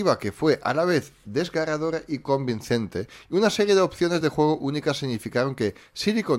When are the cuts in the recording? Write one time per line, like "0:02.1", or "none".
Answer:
none